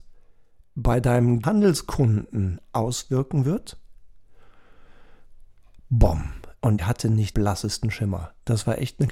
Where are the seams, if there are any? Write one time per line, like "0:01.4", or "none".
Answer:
0:01.4
0:06.8
0:07.3

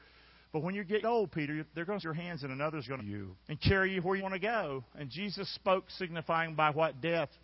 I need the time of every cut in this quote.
0:01.0
0:02.0
0:03.0
0:03.4
0:04.2

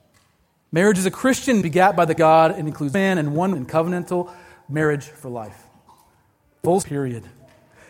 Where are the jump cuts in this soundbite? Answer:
0:01.6
0:02.2
0:02.9
0:03.5
0:06.8

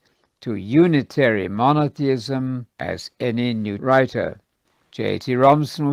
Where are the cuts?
0:02.7
0:03.8

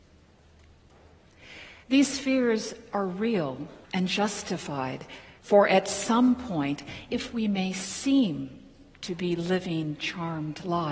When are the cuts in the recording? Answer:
0:01.8
0:03.8
0:05.4
0:07.1

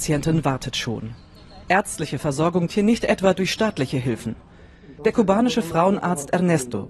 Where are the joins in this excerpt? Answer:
0:02.7

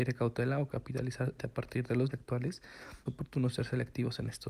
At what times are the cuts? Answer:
0:01.4
0:02.1
0:03.1

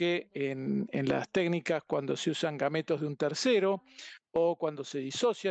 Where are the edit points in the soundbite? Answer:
none

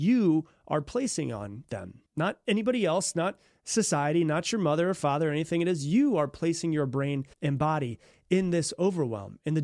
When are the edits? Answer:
0:02.1
0:07.3

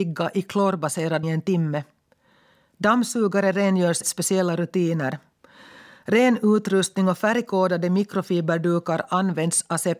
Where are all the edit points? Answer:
0:01.2
0:04.0

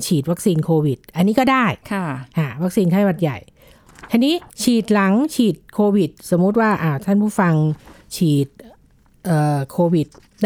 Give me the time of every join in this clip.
0:01.8
0:04.5

